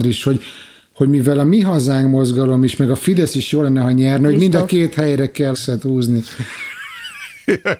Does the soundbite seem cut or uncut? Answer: cut